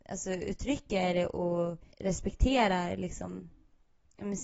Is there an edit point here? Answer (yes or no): yes